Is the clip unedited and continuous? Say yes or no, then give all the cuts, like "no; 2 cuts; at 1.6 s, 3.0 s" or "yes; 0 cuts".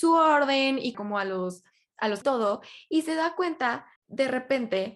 no; 3 cuts; at 0.9 s, 2.2 s, 4.0 s